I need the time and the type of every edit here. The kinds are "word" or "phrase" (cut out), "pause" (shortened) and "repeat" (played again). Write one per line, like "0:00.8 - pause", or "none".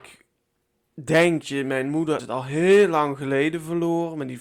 0:01.4 - word
0:02.2 - word